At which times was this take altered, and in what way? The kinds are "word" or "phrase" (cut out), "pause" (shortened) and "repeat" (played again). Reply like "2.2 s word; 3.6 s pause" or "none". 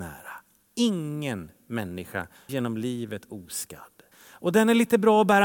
2.5 s word; 4.1 s pause